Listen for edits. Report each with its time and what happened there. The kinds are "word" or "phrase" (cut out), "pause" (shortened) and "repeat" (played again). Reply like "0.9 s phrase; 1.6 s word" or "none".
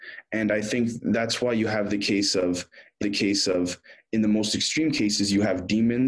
3.0 s repeat